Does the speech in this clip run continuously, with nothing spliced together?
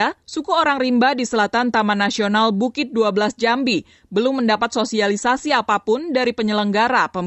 yes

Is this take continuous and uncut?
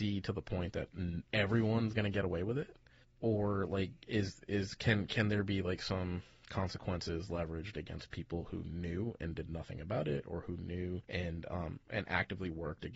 no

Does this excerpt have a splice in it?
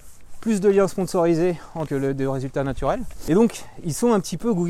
yes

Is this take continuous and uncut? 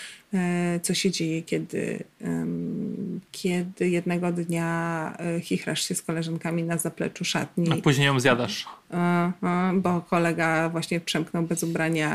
no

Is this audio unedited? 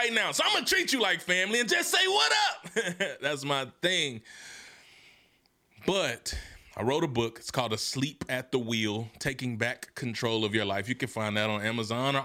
yes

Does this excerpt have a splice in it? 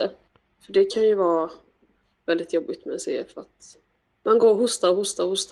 no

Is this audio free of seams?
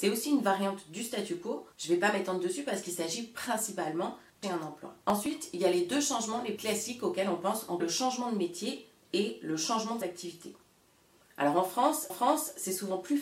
no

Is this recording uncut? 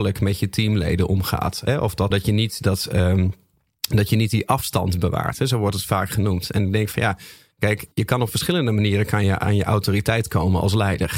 no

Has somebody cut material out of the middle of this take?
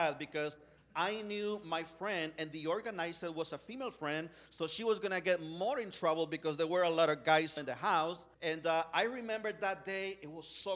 yes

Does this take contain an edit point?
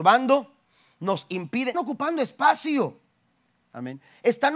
yes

